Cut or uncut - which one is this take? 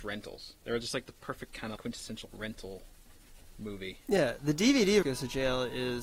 cut